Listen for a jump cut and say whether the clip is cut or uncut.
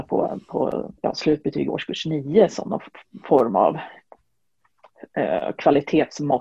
cut